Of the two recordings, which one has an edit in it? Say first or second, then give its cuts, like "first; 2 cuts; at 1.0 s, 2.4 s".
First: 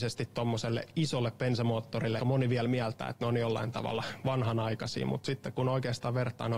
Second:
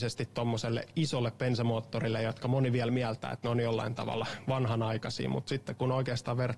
first; 1 cut; at 2.2 s